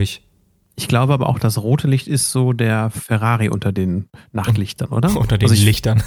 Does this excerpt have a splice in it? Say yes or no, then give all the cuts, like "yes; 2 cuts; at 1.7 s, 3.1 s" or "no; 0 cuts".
no; 0 cuts